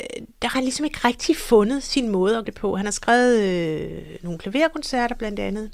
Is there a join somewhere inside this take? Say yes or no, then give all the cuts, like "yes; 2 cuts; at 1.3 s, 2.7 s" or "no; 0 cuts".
yes; 1 cut; at 2.4 s